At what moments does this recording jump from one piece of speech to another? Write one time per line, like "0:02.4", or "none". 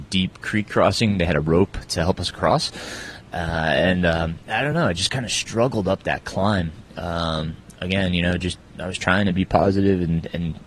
none